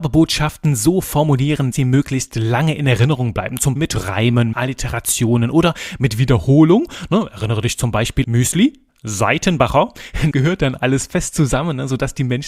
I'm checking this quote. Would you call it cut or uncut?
cut